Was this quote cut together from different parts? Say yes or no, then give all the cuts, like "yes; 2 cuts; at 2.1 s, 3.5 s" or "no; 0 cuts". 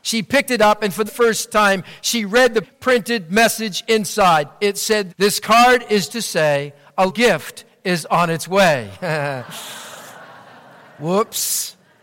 yes; 5 cuts; at 1.1 s, 2.6 s, 5.1 s, 6.1 s, 7.1 s